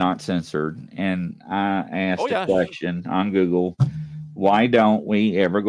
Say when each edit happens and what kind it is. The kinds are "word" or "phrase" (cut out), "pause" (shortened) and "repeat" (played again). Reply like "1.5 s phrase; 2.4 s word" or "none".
none